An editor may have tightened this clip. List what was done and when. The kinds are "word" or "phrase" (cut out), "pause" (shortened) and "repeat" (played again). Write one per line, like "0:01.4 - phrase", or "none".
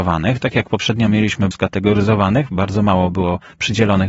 0:01.5 - phrase